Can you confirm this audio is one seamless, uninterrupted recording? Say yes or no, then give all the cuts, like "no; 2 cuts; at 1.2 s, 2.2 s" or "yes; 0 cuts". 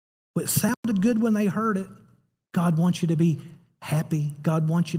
yes; 0 cuts